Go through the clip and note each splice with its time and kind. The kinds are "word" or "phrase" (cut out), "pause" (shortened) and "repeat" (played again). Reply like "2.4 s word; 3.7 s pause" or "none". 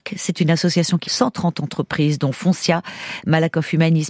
1.0 s word